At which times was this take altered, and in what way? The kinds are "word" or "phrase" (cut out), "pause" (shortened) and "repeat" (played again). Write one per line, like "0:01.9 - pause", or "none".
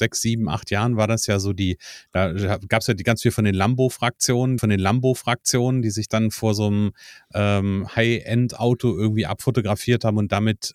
0:04.6 - repeat